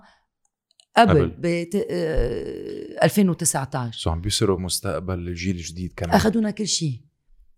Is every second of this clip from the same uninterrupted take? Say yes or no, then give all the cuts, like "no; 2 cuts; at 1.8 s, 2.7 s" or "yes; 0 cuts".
yes; 0 cuts